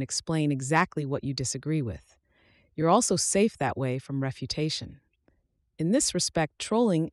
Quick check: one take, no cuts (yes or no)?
yes